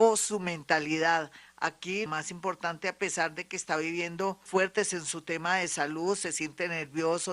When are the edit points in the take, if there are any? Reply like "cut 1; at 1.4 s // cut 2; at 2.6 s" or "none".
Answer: cut 1; at 2.1 s // cut 2; at 4.5 s